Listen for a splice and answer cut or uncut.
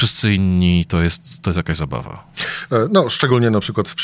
uncut